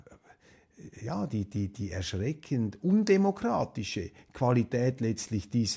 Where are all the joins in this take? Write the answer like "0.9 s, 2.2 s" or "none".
none